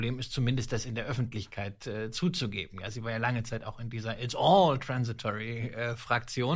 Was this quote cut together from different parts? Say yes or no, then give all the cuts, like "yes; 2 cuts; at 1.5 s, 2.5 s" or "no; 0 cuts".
no; 0 cuts